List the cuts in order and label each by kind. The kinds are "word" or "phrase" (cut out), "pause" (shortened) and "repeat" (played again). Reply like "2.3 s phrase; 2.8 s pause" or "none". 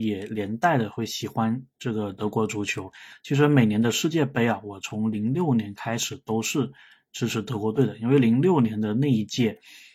none